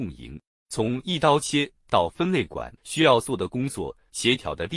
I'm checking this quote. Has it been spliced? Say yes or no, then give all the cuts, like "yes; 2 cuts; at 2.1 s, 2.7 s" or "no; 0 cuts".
yes; 1 cut; at 2.8 s